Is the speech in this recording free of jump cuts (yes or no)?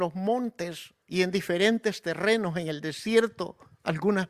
no